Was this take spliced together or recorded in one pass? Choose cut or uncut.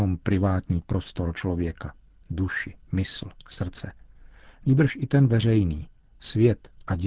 uncut